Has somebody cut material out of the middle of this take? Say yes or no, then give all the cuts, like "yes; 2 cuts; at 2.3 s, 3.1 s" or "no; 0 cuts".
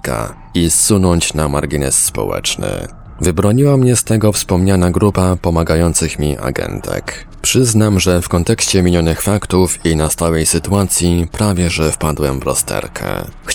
no; 0 cuts